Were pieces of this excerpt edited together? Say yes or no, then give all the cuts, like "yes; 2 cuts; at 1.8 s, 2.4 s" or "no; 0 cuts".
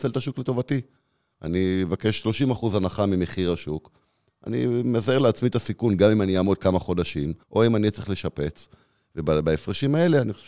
yes; 1 cut; at 7.4 s